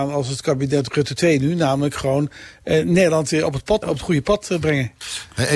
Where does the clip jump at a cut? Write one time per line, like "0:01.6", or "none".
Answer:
0:03.8